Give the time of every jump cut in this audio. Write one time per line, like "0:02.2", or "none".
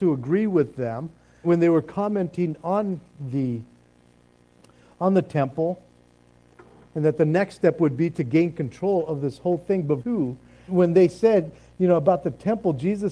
0:01.4
0:10.0
0:10.7